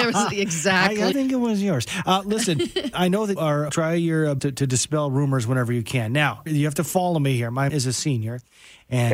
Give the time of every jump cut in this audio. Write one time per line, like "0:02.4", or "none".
0:01.1
0:02.9
0:03.4
0:03.7
0:04.4
0:06.5
0:07.7